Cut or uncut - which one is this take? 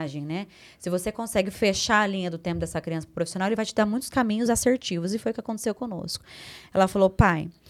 uncut